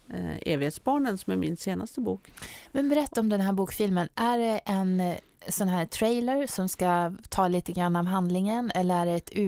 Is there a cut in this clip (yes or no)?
no